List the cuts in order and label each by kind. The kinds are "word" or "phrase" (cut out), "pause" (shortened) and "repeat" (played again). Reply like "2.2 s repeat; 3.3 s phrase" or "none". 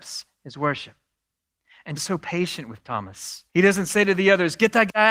2.0 s word; 3.5 s pause